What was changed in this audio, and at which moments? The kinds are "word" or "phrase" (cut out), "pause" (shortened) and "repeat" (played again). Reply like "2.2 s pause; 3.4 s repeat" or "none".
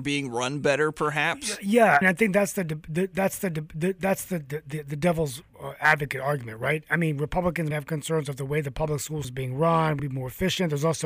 2.0 s phrase; 3.4 s repeat; 7.7 s word; 9.2 s word; 10.0 s word